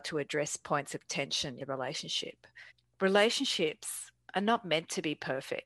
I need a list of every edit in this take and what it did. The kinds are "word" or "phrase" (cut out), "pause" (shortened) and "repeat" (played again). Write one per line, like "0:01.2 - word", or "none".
0:01.6 - word
0:02.7 - pause